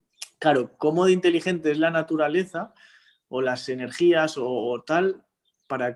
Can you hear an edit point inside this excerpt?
no; 0 cuts

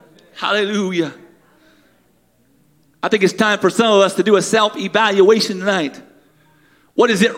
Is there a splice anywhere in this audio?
no; 0 cuts

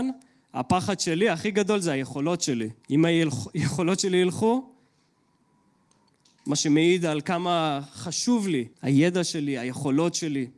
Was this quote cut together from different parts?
yes; 2 cuts; at 2.8 s, 8.7 s

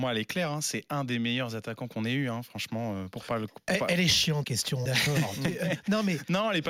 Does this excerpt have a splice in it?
yes; 2 cuts; at 4.4 s, 4.9 s

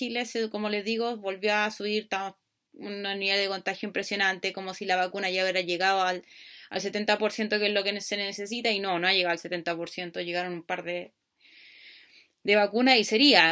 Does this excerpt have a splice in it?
no; 0 cuts

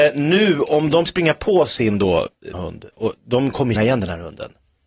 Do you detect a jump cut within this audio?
yes; 4 cuts; at 1.1 s, 2.5 s, 2.9 s, 3.7 s

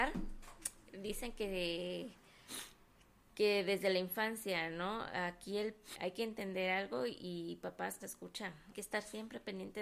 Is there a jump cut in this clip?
yes; 3 cuts; at 5.9 s, 8.0 s, 8.7 s

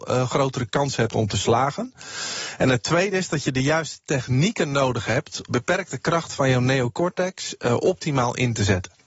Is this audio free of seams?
no; 1 cut; at 5.5 s

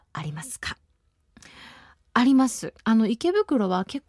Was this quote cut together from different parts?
yes; 1 cut; at 2.8 s

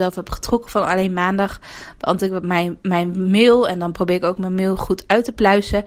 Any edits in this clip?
no; 0 cuts

